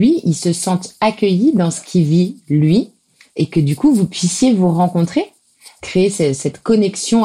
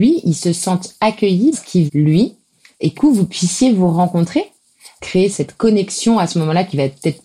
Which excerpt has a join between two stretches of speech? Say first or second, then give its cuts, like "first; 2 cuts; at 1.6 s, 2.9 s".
second; 4 cuts; at 1.5 s, 1.9 s, 3.0 s, 5.3 s